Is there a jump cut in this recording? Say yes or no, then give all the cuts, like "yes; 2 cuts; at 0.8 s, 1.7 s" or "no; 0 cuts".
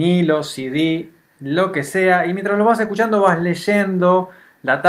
no; 0 cuts